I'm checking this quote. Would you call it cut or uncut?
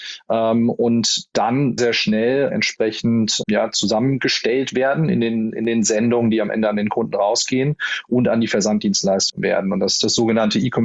cut